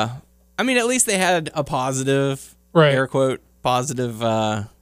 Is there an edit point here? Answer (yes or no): no